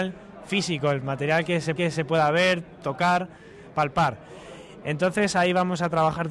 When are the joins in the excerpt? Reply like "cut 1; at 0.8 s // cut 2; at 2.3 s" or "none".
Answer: cut 1; at 1.8 s